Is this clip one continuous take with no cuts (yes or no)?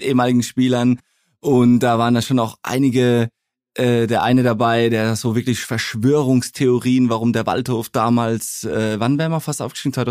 yes